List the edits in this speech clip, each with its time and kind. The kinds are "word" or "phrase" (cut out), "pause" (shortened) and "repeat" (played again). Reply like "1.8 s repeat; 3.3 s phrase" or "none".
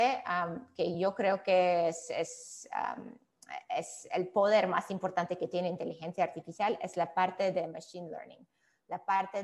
none